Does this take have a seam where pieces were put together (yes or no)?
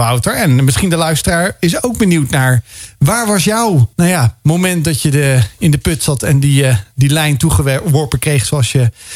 yes